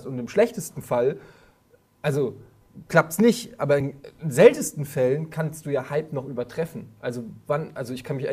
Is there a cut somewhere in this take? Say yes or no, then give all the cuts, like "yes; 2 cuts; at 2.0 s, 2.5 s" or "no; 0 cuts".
no; 0 cuts